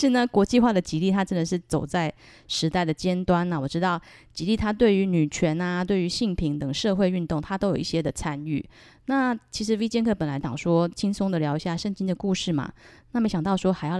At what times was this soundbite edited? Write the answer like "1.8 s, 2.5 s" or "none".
none